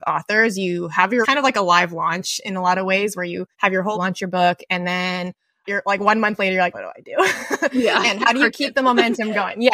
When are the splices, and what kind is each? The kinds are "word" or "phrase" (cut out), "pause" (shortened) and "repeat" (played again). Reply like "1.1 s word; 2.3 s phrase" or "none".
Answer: 1.2 s word; 3.5 s pause; 3.9 s phrase; 5.6 s word; 6.7 s word